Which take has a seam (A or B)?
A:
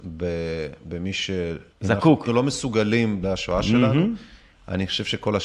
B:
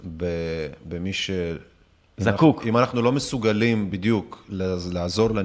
A